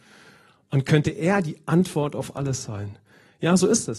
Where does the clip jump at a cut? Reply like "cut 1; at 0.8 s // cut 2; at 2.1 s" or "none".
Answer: none